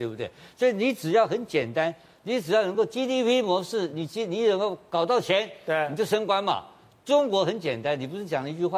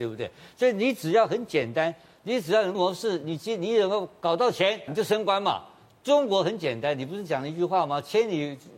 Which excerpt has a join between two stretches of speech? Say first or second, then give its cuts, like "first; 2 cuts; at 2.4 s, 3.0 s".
second; 2 cuts; at 2.7 s, 4.9 s